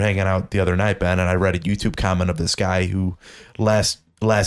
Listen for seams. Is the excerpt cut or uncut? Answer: uncut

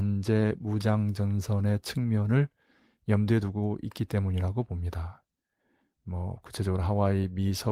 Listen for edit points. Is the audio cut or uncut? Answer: uncut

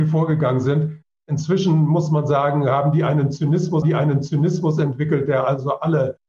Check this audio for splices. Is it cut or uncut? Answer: cut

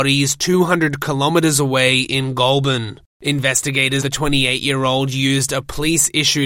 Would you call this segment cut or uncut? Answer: cut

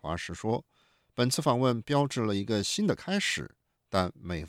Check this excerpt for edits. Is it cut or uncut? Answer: uncut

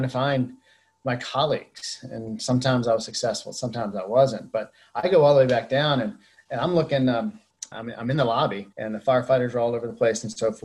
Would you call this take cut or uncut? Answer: cut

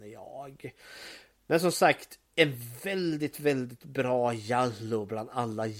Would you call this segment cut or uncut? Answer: cut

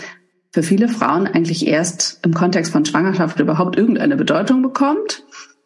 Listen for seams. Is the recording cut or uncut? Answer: uncut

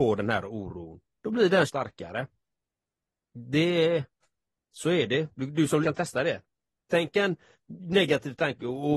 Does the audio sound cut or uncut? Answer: cut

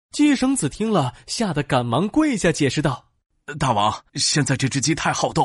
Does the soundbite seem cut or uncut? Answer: cut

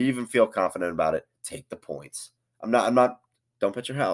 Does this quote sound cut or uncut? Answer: uncut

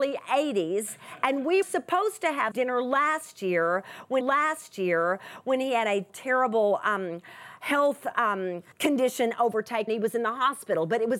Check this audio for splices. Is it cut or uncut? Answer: cut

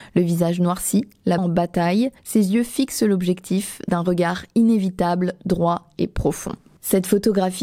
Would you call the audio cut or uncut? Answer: cut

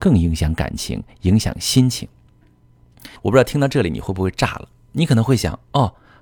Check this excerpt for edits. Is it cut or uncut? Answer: cut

